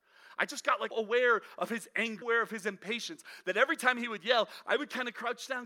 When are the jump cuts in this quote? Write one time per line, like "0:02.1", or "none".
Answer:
0:00.9
0:02.2